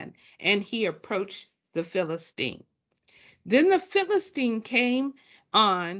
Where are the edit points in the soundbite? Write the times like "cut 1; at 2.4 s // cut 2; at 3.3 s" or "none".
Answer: none

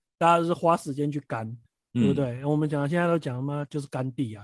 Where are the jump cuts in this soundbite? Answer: cut 1; at 1.6 s

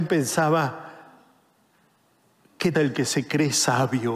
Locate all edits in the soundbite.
cut 1; at 2.7 s

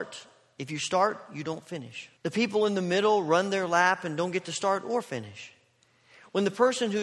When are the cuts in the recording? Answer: cut 1; at 2.2 s

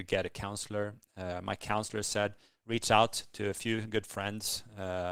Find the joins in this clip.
none

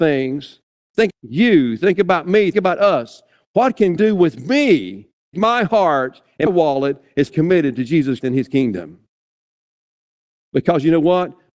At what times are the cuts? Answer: cut 1; at 1.1 s // cut 2; at 2.5 s // cut 3; at 4.0 s // cut 4; at 5.3 s // cut 5; at 6.5 s // cut 6; at 7.3 s // cut 7; at 8.2 s

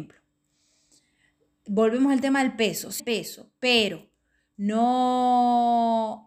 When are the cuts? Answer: cut 1; at 3.0 s

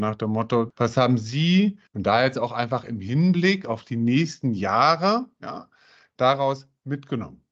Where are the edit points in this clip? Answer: cut 1; at 1.9 s

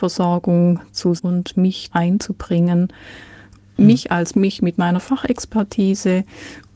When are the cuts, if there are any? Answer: cut 1; at 1.2 s // cut 2; at 1.9 s // cut 3; at 4.3 s

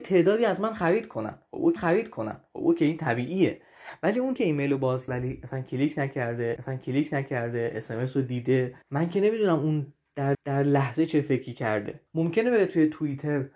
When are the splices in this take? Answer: cut 1; at 1.8 s // cut 2; at 4.4 s // cut 3; at 5.1 s // cut 4; at 6.6 s // cut 5; at 8.8 s // cut 6; at 10.3 s // cut 7; at 12.1 s

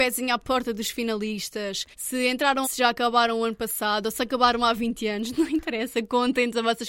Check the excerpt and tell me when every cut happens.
cut 1; at 1.9 s // cut 2; at 2.6 s

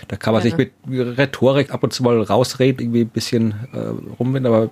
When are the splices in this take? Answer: cut 1; at 1.7 s // cut 2; at 2.8 s

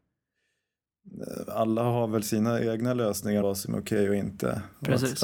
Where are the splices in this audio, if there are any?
cut 1; at 3.4 s

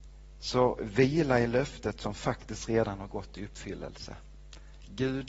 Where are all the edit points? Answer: none

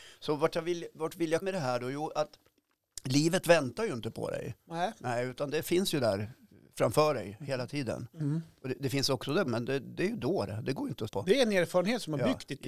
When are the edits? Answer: cut 1; at 1.4 s // cut 2; at 9.5 s // cut 3; at 11.1 s

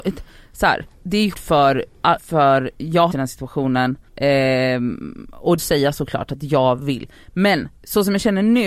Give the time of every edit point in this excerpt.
cut 1; at 0.9 s // cut 2; at 1.3 s // cut 3; at 2.2 s // cut 4; at 3.1 s // cut 5; at 4.1 s // cut 6; at 5.6 s // cut 7; at 7.8 s

